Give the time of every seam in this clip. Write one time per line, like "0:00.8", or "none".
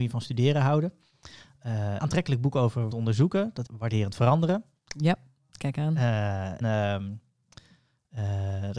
0:02.0
0:02.9
0:03.7
0:06.6